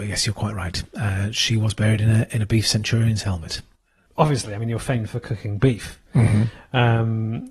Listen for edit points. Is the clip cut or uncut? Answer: uncut